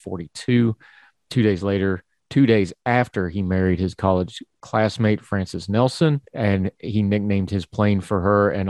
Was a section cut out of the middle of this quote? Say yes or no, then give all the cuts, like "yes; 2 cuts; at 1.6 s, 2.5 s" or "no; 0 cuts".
yes; 2 cuts; at 1.3 s, 6.3 s